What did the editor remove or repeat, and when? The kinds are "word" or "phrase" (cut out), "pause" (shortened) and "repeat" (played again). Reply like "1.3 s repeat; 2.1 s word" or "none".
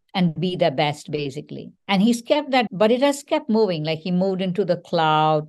1.8 s pause; 2.7 s word